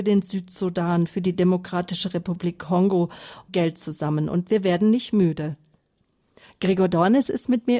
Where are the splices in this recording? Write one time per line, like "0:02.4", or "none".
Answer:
0:03.5